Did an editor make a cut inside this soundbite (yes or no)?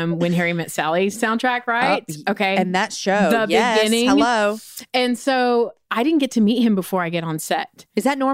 no